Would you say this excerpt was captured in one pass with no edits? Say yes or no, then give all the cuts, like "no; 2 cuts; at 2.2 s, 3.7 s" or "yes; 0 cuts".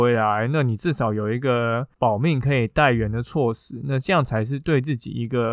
no; 1 cut; at 1.9 s